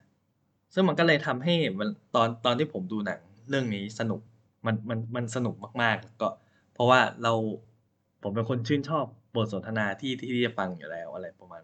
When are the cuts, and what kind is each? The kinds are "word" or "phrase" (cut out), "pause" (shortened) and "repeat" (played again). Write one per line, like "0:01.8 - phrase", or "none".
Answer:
none